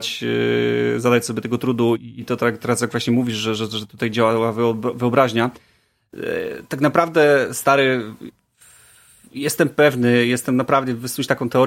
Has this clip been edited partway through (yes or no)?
no